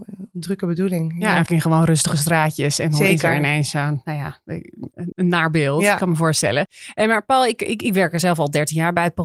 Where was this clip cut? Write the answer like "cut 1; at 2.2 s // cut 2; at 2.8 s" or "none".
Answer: cut 1; at 1.5 s // cut 2; at 5.1 s